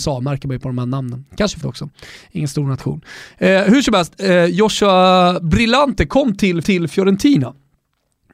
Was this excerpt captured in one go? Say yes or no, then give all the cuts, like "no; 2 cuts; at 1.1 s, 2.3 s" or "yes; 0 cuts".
no; 2 cuts; at 1.6 s, 6.6 s